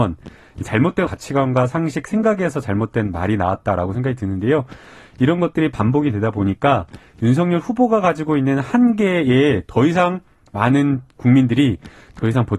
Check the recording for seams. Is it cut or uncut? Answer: cut